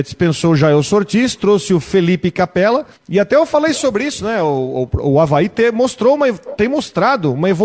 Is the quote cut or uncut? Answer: cut